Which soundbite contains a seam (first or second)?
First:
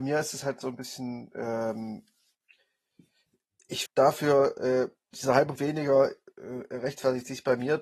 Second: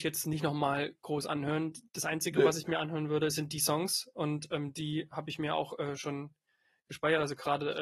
first